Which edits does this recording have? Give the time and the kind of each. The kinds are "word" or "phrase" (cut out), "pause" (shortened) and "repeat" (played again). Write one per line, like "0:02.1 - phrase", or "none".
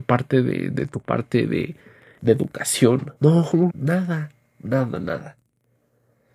0:01.0 - word
0:02.2 - word
0:03.2 - pause
0:03.7 - phrase